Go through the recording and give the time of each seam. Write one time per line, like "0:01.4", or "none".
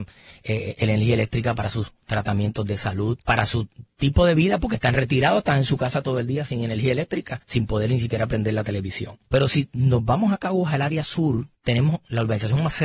0:03.2
0:07.4
0:09.3
0:11.5